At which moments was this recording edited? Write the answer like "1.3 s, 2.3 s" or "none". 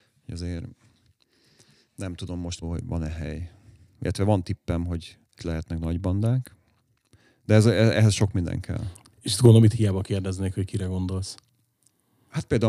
2.6 s, 5.4 s